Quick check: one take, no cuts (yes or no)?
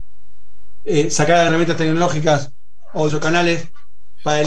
no